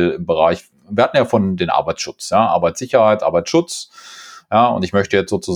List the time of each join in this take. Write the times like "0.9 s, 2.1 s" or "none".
none